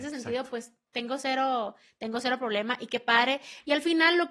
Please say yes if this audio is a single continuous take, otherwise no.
yes